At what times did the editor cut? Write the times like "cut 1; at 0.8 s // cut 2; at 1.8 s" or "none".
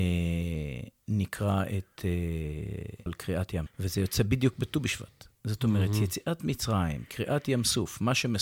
cut 1; at 3.1 s // cut 2; at 3.7 s